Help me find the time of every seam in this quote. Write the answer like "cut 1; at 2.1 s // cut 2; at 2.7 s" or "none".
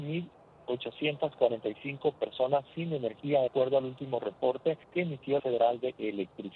cut 1; at 3.5 s // cut 2; at 4.8 s // cut 3; at 5.4 s